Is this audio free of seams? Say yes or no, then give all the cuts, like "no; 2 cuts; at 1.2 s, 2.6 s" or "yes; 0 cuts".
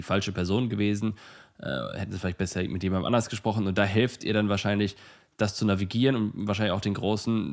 yes; 0 cuts